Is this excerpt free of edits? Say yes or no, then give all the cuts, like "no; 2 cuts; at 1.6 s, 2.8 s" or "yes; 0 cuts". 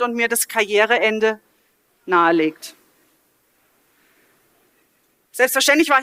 yes; 0 cuts